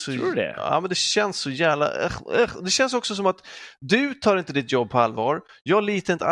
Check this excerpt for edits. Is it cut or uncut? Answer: uncut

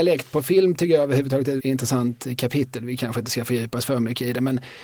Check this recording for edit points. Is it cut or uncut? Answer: cut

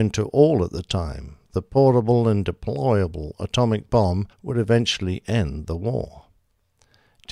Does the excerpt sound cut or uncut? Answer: cut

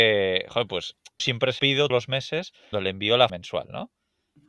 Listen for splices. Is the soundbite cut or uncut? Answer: cut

